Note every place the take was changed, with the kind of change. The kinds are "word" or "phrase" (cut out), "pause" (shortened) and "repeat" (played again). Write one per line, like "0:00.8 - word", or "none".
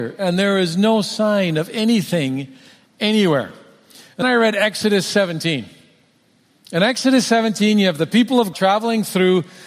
0:04.2 - word
0:08.5 - word